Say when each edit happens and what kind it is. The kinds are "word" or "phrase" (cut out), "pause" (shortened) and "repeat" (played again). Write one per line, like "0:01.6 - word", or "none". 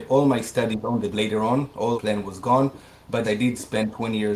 0:01.1 - word
0:01.9 - word
0:03.2 - word

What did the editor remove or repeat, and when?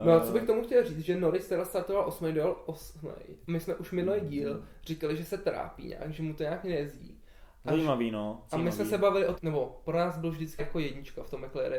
0:09.4 - word
0:10.6 - word

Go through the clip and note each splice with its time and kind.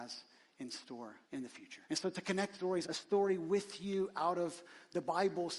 0:01.2 - pause
0:01.8 - pause
0:02.5 - word
0:02.8 - phrase

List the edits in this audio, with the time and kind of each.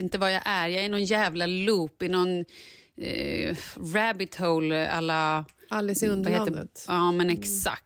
none

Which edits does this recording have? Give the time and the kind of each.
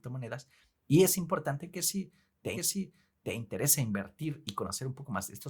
0:02.6 - repeat

